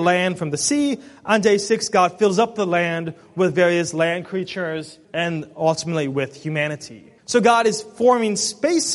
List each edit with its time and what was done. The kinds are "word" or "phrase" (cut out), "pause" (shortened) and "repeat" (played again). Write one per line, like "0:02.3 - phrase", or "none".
0:05.0 - pause
0:07.2 - pause